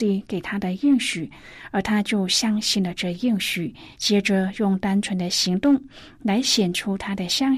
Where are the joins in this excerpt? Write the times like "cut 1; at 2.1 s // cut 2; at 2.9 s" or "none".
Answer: cut 1; at 3.9 s